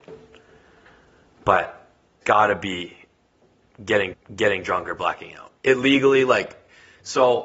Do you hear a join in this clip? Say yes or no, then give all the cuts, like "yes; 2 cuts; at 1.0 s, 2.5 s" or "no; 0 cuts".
yes; 3 cuts; at 2.2 s, 4.1 s, 5.6 s